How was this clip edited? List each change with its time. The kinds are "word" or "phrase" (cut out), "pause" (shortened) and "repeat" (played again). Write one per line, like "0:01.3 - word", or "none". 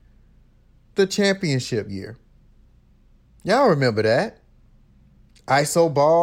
none

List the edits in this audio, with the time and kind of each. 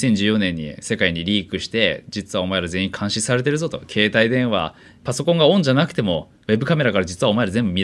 none

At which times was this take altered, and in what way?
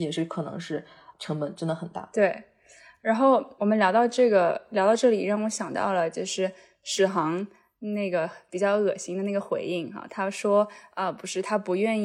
0:01.1 - word
0:03.6 - word

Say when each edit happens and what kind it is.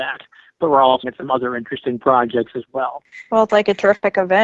0:01.0 - word
0:03.5 - word

